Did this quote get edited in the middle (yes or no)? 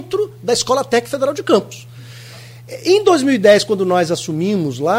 no